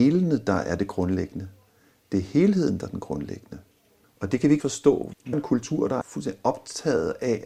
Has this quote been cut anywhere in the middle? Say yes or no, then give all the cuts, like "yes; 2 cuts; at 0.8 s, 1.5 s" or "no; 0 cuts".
yes; 4 cuts; at 4.0 s, 4.6 s, 5.3 s, 6.0 s